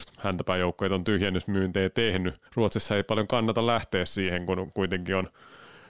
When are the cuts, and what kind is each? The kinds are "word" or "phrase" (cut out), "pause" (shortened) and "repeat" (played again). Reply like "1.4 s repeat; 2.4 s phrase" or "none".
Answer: 2.5 s pause